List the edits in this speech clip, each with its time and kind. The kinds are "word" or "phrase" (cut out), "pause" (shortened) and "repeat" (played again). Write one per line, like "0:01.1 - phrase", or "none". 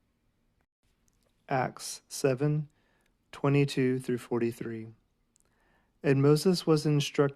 none

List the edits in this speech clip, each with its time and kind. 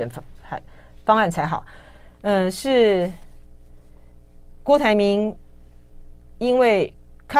none

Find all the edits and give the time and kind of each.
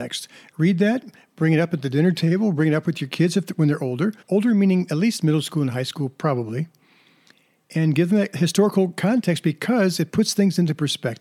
0:04.2 - pause

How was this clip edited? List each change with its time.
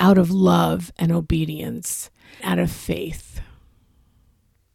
0:02.4 - word

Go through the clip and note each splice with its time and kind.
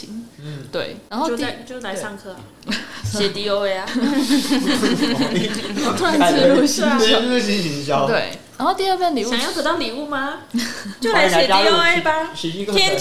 none

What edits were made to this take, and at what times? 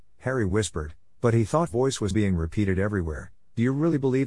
0:01.7 - word
0:02.1 - word

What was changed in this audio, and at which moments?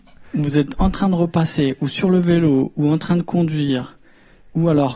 none

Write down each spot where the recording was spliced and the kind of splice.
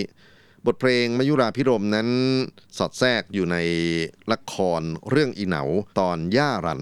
0:04.2 - pause
0:05.9 - pause

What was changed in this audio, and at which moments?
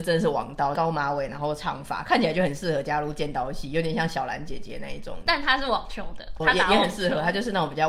0:06.4 - word

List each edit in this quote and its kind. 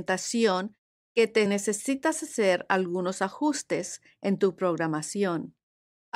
0:01.5 - phrase

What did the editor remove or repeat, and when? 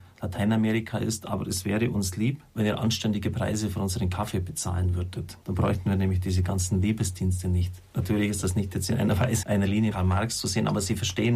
0:02.5 - pause
0:05.4 - pause
0:09.4 - word
0:09.9 - word

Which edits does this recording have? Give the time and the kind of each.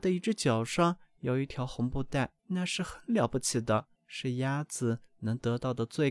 0:02.4 - pause
0:04.0 - pause

